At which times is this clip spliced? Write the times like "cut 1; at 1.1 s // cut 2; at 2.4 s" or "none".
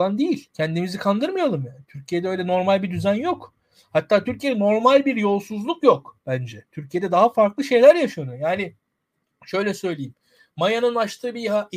none